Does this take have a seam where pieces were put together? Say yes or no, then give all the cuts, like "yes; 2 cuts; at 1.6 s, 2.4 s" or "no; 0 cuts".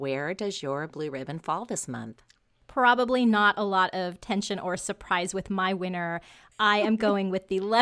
no; 0 cuts